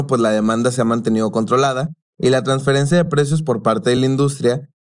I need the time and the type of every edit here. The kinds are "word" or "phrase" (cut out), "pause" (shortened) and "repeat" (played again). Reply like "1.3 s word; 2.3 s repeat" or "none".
none

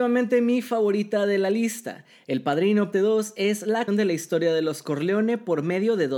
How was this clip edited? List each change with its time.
2.9 s word; 3.9 s word

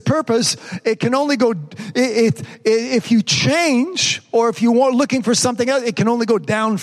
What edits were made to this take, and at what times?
none

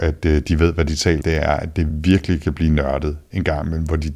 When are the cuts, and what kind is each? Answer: 1.2 s word; 1.9 s word

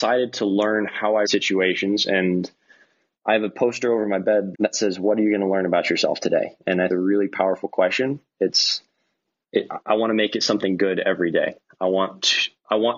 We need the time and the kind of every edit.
1.2 s phrase; 4.5 s word; 6.9 s phrase

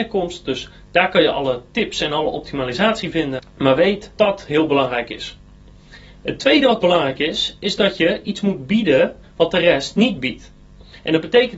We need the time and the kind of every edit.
4.2 s word; 9.2 s pause

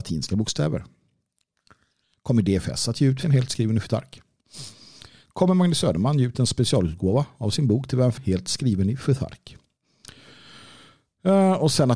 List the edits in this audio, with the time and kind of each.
3.2 s word; 8.2 s word

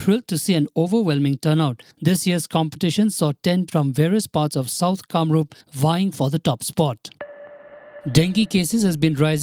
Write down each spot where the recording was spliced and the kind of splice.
1.9 s pause; 3.7 s word; 5.6 s pause

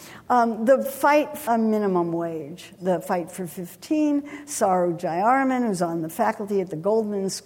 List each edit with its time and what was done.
1.5 s word

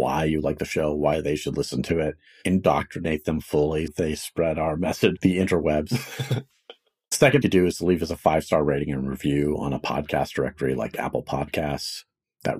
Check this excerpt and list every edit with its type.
3.9 s word; 5.2 s phrase; 7.4 s phrase

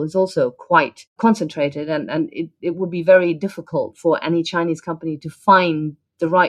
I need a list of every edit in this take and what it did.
none

